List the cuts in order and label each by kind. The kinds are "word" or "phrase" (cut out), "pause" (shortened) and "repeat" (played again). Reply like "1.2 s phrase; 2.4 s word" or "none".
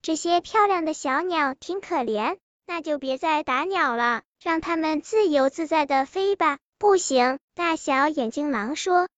2.4 s pause